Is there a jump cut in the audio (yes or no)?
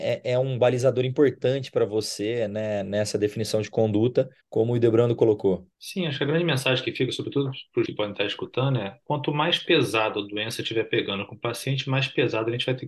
yes